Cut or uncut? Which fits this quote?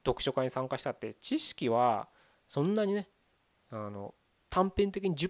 uncut